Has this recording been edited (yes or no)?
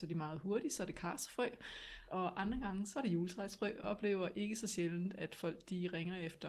yes